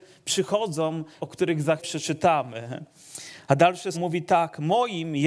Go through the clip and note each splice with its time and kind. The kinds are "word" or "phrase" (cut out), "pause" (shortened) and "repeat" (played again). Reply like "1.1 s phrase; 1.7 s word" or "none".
1.2 s word; 1.8 s word; 3.9 s word